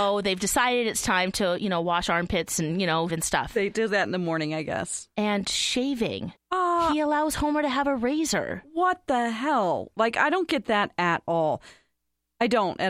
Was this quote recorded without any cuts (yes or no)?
no